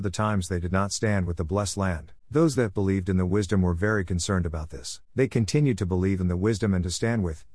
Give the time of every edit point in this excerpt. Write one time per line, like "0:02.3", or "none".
0:02.2
0:05.0

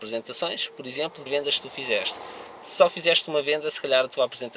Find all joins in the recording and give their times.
0:01.3

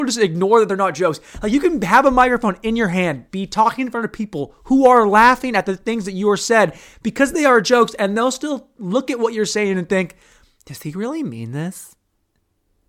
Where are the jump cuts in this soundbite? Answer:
none

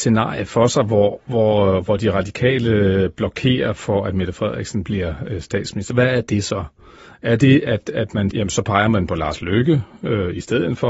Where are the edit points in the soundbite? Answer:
0:08.3

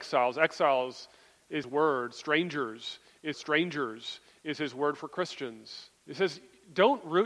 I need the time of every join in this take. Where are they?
0:01.6
0:03.3
0:06.0

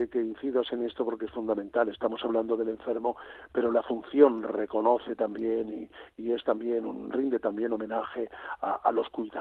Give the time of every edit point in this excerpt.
none

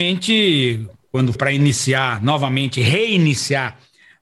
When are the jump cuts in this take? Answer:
0:01.4

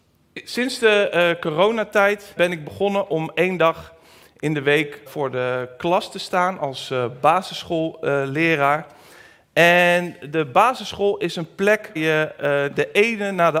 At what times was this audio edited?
0:02.4
0:05.1
0:12.0

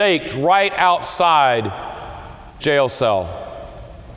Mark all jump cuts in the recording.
0:02.6

